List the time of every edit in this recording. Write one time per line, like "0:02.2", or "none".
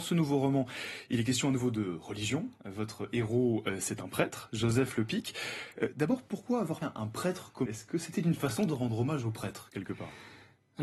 0:06.8
0:07.7